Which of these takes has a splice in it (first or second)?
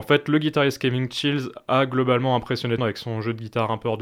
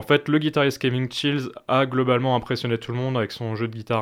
first